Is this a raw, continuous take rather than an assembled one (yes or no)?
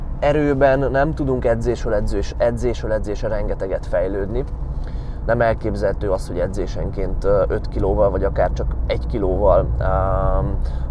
yes